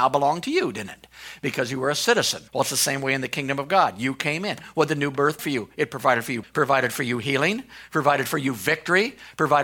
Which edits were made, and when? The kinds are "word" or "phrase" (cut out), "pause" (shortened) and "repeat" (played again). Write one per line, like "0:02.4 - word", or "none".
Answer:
0:02.5 - pause
0:05.4 - word
0:06.4 - word